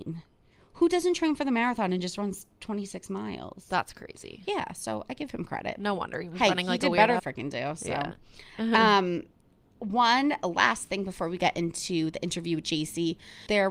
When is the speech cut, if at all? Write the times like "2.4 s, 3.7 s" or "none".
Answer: 7.2 s